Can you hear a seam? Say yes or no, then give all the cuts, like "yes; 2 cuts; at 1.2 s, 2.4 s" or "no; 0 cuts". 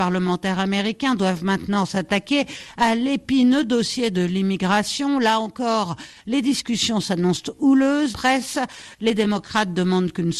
yes; 1 cut; at 8.1 s